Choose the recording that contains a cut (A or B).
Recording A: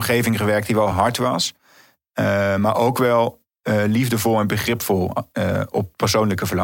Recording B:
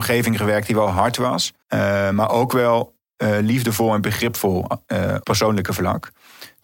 B